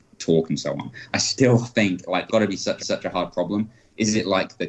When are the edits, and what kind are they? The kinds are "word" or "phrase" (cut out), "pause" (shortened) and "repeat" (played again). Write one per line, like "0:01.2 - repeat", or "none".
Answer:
0:01.1 - word
0:02.3 - word
0:02.8 - repeat